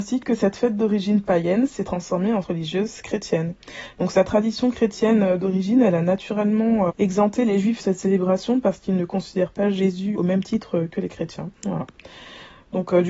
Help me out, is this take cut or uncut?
cut